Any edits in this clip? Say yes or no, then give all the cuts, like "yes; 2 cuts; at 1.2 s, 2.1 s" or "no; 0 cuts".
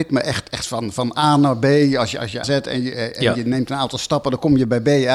yes; 1 cut; at 2.4 s